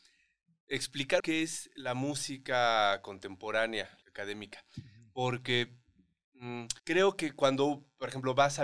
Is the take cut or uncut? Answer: cut